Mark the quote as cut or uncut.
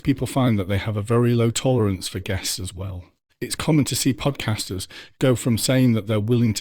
uncut